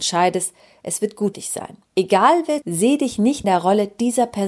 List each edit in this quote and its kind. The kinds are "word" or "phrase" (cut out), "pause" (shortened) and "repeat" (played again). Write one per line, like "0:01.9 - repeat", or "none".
0:01.3 - word
0:01.9 - pause
0:02.6 - phrase
0:03.4 - word